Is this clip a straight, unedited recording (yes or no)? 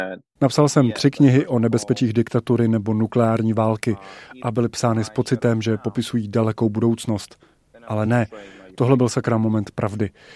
yes